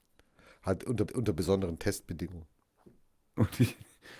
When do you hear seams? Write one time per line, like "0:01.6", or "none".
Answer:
0:01.1